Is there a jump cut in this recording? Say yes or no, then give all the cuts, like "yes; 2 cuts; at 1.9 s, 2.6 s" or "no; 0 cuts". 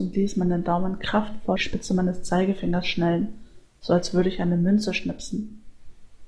yes; 1 cut; at 1.6 s